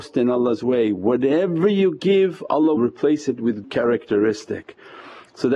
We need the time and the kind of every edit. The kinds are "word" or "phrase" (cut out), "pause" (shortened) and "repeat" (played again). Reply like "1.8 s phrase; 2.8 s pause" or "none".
2.8 s word; 3.6 s word